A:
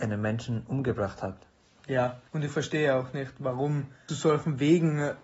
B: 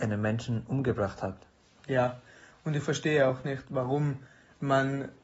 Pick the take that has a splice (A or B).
A